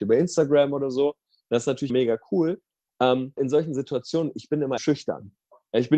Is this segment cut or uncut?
cut